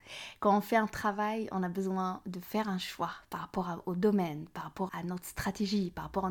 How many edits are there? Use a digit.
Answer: 1